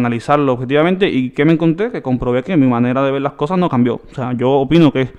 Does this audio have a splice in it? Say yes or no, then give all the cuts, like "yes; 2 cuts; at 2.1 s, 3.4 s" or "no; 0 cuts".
no; 0 cuts